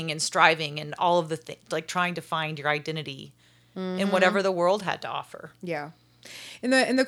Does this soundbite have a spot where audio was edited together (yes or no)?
no